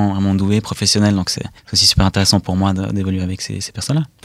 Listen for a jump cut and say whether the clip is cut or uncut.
cut